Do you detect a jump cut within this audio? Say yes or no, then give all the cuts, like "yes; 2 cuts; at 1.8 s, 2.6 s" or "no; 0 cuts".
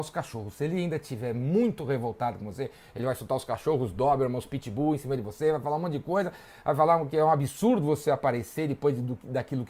no; 0 cuts